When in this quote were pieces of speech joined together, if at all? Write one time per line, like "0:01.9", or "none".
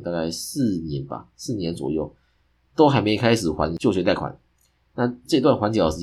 none